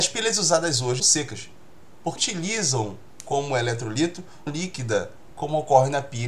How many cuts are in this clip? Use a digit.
3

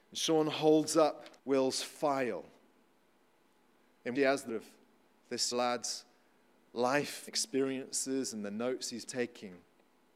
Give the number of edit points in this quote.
6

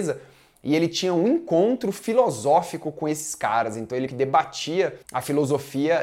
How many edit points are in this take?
2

